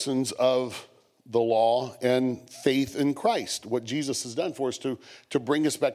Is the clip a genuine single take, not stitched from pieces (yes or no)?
yes